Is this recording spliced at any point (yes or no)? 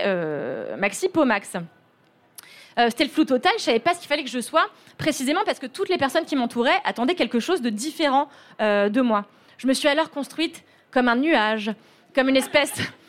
no